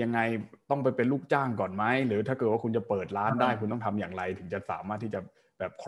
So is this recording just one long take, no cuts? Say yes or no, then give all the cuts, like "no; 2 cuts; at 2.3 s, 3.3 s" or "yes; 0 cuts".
yes; 0 cuts